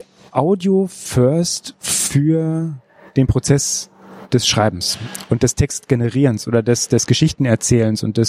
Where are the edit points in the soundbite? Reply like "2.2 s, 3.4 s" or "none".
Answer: none